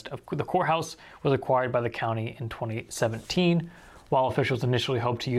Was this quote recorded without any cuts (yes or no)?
yes